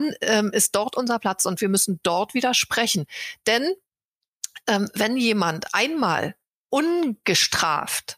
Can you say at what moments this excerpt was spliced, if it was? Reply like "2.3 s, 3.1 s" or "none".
none